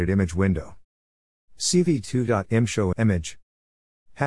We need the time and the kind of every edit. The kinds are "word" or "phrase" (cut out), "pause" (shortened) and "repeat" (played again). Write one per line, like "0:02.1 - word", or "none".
0:02.9 - word